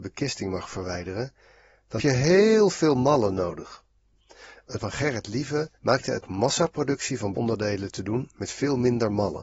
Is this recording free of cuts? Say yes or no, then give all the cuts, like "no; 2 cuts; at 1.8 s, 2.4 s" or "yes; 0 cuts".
no; 5 cuts; at 2.0 s, 4.8 s, 5.8 s, 6.2 s, 7.3 s